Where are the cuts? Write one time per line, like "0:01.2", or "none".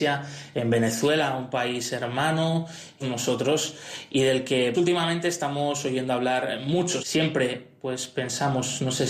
0:03.0
0:04.7
0:07.0